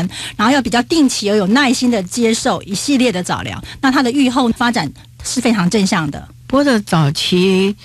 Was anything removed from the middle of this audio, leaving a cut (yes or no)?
no